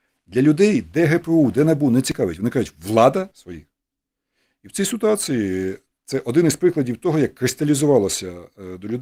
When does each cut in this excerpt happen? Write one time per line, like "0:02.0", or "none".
0:03.3